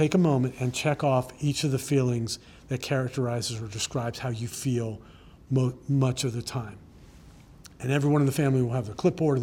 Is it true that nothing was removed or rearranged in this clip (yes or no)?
yes